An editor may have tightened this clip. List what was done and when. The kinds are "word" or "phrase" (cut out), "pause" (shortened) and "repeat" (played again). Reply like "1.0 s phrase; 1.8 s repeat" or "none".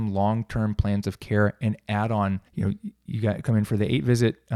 2.5 s pause